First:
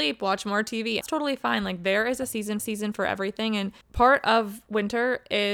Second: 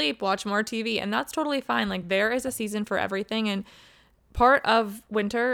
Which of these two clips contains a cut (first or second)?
first